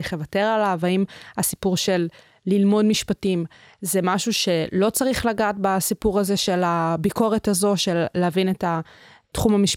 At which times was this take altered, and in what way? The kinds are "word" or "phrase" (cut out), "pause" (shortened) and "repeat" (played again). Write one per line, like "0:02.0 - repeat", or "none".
none